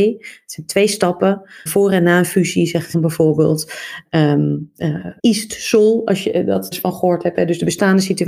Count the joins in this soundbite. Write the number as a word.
four